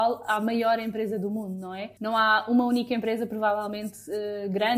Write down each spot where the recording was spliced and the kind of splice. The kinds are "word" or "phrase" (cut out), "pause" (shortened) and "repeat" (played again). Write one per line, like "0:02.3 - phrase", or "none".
0:02.0 - pause